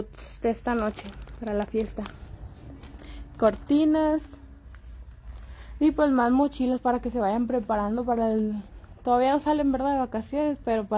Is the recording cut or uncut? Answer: uncut